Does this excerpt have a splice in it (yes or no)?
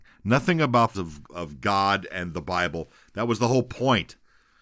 yes